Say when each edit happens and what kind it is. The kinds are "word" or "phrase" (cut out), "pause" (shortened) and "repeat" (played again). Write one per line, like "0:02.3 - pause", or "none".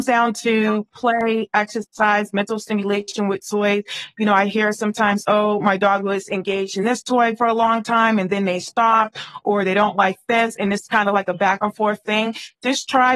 none